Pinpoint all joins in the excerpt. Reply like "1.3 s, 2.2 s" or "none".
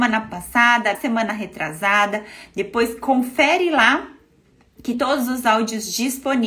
0.9 s, 4.9 s